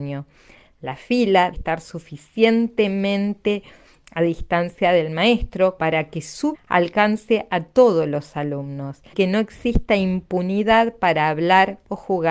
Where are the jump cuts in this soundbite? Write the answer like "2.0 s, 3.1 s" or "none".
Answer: 1.5 s, 5.8 s, 6.5 s, 9.1 s